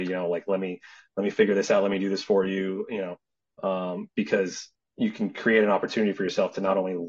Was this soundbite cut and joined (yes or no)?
no